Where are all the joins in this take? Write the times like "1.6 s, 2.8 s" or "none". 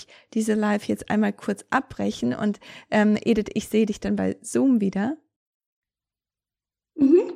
none